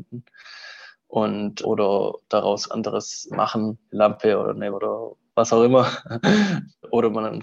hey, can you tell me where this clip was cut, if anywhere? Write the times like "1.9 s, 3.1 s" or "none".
1.6 s, 2.7 s, 3.3 s, 4.7 s